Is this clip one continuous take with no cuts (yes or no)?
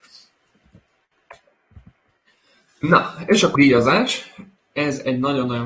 no